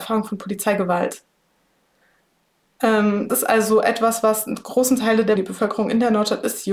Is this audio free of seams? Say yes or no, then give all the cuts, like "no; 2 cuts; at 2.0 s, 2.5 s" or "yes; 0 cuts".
no; 2 cuts; at 3.3 s, 5.4 s